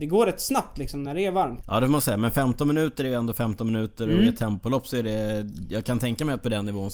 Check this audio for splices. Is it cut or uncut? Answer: uncut